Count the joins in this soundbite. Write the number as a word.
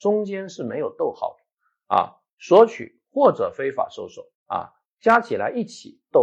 one